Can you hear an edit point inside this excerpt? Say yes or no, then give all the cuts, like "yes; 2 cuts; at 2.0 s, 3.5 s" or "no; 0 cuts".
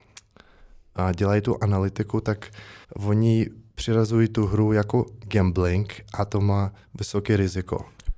yes; 1 cut; at 2.8 s